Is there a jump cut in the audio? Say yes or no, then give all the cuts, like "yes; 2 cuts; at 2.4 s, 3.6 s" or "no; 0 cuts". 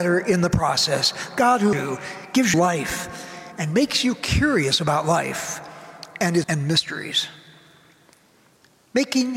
yes; 3 cuts; at 1.7 s, 2.5 s, 6.4 s